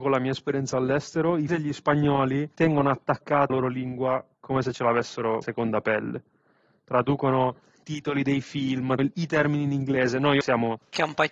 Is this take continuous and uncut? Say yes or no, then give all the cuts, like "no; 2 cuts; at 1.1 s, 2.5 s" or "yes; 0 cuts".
no; 7 cuts; at 1.5 s, 2.5 s, 3.5 s, 5.4 s, 7.8 s, 9.0 s, 10.4 s